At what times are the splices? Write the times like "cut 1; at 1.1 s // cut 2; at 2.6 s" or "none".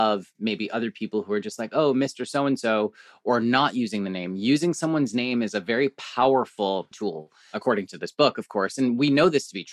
cut 1; at 6.9 s